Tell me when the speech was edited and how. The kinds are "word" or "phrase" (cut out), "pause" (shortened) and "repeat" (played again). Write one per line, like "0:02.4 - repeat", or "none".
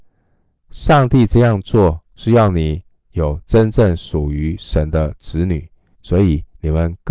0:05.9 - pause